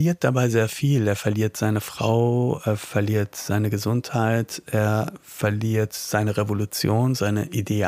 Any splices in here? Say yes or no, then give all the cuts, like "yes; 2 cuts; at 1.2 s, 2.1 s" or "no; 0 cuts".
no; 0 cuts